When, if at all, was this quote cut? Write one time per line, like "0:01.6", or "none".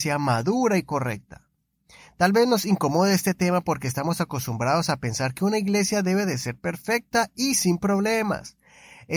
none